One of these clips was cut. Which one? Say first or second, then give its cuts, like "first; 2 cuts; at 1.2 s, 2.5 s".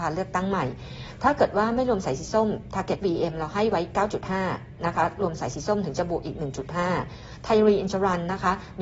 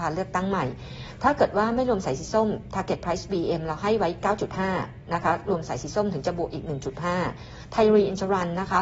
first; 1 cut; at 3.0 s